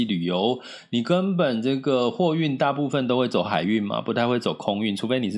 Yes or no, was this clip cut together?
no